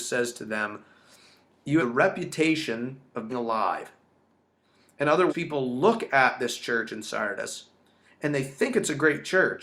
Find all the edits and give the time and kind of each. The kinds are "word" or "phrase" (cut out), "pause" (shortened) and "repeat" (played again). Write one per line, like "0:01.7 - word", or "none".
0:01.8 - word
0:03.3 - word
0:05.3 - word